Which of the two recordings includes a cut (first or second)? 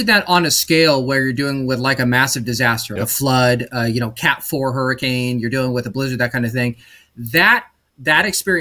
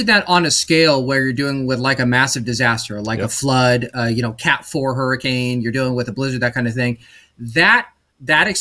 first